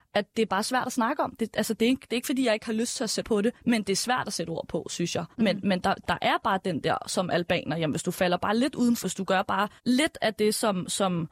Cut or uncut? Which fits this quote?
cut